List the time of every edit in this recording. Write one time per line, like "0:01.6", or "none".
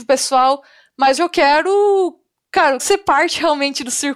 0:01.2
0:02.8